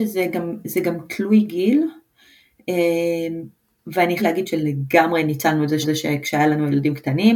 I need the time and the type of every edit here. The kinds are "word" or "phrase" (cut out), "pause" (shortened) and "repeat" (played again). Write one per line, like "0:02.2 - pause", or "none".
0:04.2 - word
0:05.8 - repeat

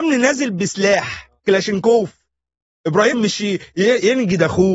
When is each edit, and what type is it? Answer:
0:01.4 - pause
0:03.1 - word

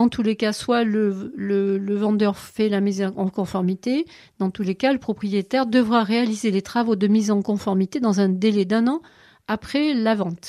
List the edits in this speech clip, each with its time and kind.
none

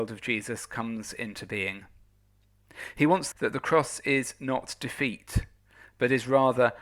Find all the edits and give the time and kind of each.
0:03.3 - phrase

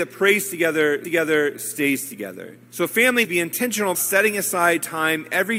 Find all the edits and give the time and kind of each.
0:01.0 - repeat
0:02.6 - pause
0:03.2 - word
0:03.9 - word

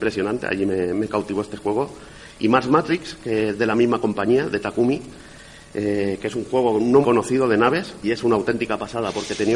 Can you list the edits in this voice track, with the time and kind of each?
0:07.0 - word
0:08.0 - word

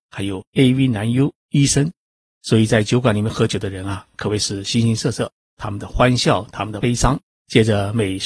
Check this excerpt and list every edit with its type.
0:01.4 - pause

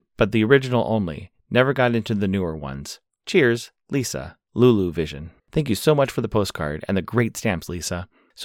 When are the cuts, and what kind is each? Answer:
0:05.4 - pause

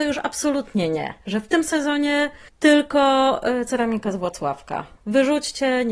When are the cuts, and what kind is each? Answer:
none

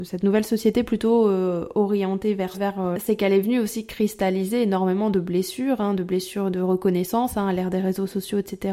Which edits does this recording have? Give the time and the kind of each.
0:02.5 - word
0:02.9 - phrase

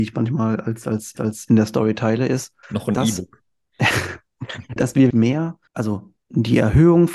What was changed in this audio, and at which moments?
0:01.2 - repeat
0:02.6 - pause
0:04.8 - word
0:05.1 - word
0:05.7 - pause

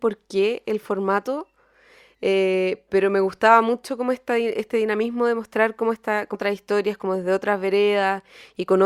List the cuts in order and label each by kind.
none

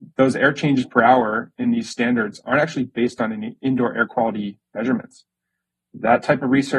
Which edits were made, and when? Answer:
none

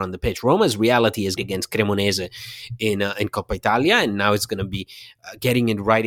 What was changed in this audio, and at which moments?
0:01.4 - phrase

